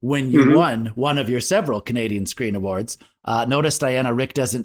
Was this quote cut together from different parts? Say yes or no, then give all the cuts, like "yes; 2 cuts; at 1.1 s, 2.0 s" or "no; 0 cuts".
no; 0 cuts